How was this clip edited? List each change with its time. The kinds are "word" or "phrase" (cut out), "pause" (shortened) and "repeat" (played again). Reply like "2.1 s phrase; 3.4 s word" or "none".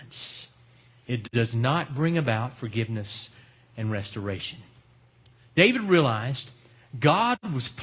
none